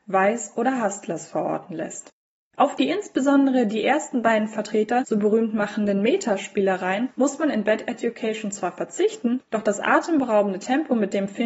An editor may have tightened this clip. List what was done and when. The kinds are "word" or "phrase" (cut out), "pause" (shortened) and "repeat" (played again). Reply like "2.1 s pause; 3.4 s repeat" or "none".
none